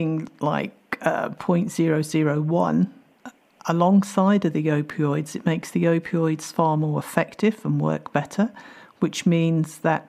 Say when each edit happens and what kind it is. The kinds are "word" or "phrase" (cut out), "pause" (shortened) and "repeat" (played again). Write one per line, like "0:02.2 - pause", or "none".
none